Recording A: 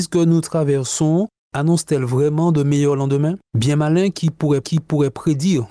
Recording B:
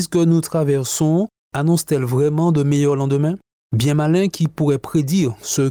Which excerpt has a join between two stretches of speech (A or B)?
A